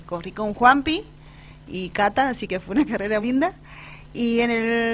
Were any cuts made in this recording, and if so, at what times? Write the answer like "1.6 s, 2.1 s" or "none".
3.2 s